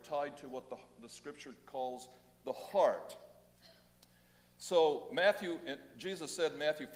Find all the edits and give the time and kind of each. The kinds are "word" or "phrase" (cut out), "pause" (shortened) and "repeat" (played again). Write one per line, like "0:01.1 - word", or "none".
none